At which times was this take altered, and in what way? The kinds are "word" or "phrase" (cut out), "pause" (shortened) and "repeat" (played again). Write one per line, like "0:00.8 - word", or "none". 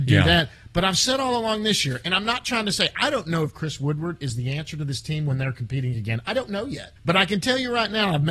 0:07.0 - pause